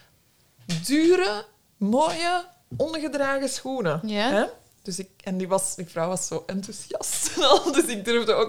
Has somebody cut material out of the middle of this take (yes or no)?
no